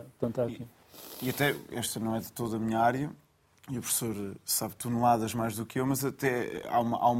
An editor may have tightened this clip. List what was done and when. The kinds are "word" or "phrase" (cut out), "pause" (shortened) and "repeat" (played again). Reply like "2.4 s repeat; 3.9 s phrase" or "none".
none